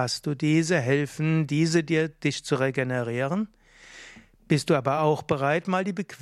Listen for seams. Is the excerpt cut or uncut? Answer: uncut